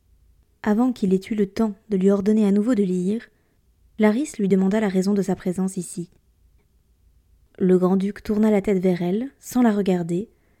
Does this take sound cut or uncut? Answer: uncut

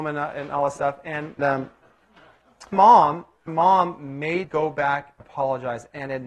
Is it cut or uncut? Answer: cut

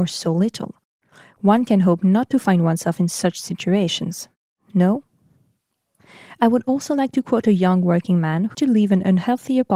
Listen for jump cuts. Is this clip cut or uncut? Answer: cut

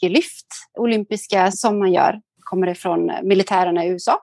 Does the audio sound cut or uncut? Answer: cut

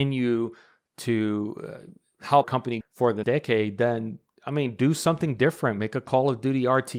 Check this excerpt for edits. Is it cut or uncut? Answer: cut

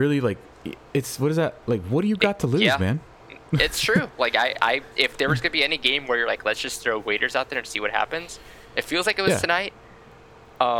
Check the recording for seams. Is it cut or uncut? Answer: cut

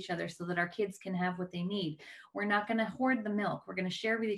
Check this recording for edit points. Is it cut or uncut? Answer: uncut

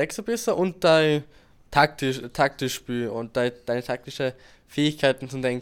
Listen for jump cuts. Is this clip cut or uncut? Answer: uncut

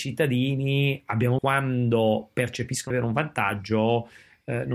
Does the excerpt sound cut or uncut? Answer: cut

